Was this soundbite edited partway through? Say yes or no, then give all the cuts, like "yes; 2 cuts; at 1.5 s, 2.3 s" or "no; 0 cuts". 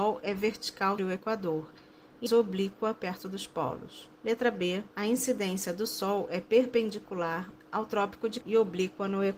yes; 6 cuts; at 1.0 s, 2.3 s, 4.2 s, 4.9 s, 7.6 s, 8.4 s